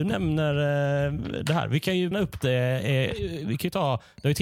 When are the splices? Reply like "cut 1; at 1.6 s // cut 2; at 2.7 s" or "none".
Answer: cut 1; at 2.1 s